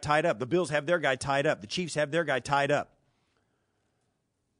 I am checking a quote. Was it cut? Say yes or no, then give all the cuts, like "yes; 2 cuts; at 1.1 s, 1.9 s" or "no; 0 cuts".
no; 0 cuts